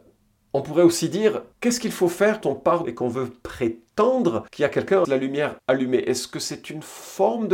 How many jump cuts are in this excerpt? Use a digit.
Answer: 6